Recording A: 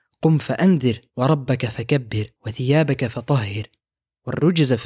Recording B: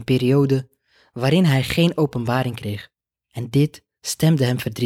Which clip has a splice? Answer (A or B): A